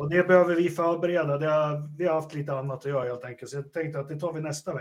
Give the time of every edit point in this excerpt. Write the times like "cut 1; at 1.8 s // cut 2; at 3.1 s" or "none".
none